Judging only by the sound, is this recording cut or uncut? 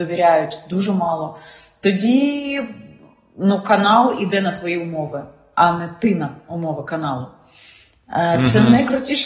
uncut